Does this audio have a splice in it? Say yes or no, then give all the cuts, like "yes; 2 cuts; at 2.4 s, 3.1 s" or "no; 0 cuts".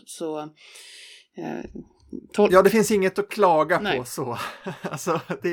no; 0 cuts